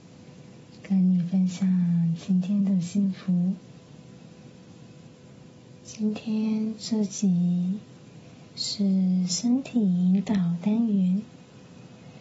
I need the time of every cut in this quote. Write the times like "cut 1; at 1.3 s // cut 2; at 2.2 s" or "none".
cut 1; at 8.5 s

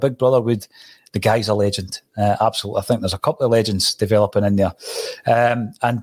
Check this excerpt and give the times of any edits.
none

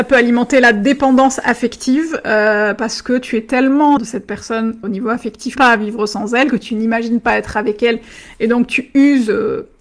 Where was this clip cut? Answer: cut 1; at 4.0 s // cut 2; at 4.8 s // cut 3; at 5.6 s

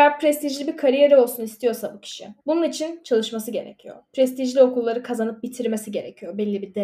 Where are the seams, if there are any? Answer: cut 1; at 2.4 s

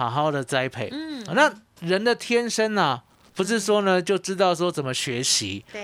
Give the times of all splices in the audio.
cut 1; at 1.3 s

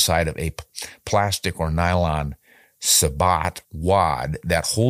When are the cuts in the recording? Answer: cut 1; at 3.6 s

